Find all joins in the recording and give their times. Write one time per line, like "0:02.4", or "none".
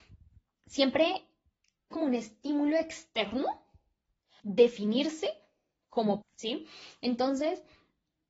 0:01.9
0:04.4
0:06.2